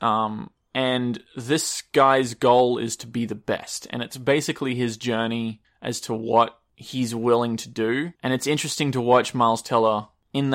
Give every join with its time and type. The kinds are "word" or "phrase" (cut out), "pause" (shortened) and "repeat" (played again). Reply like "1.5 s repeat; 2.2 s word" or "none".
8.2 s pause